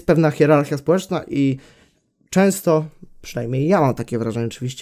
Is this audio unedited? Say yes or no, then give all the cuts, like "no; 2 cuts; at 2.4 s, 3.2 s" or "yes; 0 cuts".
yes; 0 cuts